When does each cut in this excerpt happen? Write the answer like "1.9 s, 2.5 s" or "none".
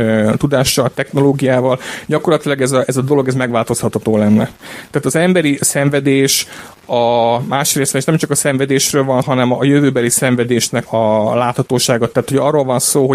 9.2 s, 10.9 s